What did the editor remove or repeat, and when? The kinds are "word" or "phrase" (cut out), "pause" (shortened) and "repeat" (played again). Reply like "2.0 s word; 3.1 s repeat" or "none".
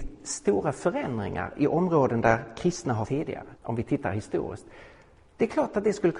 3.0 s word; 3.5 s pause